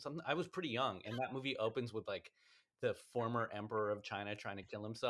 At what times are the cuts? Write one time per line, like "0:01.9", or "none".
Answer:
none